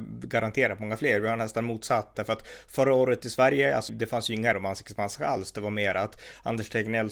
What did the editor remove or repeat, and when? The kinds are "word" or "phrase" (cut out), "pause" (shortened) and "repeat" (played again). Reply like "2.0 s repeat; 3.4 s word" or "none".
2.1 s word; 3.9 s word; 4.5 s word